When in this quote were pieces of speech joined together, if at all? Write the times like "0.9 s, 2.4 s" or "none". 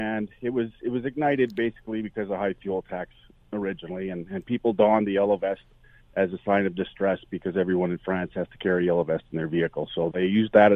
none